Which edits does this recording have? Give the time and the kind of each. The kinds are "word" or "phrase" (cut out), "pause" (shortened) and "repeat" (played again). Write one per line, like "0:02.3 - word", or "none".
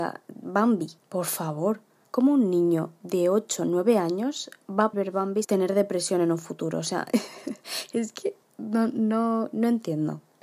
0:04.9 - word
0:05.4 - word
0:08.4 - pause